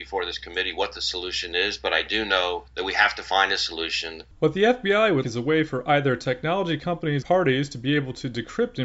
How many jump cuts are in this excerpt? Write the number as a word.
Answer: four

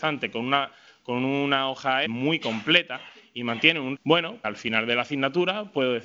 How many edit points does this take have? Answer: three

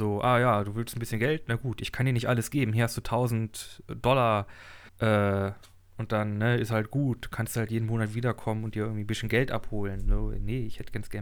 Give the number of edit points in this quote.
one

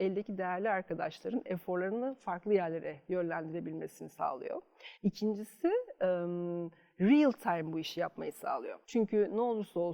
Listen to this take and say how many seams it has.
two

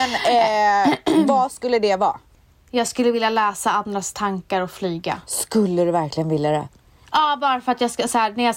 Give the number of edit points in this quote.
zero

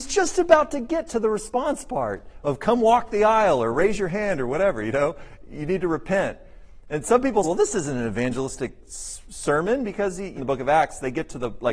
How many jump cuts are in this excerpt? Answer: two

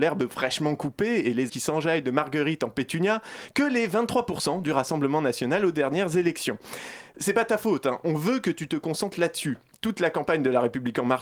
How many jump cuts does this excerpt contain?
one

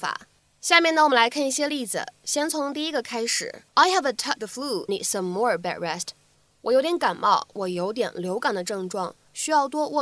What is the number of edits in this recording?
four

